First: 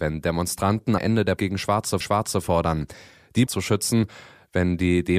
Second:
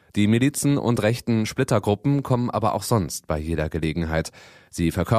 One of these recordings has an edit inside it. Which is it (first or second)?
first